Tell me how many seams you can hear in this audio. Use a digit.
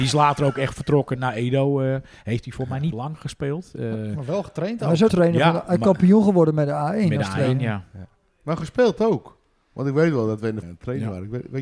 4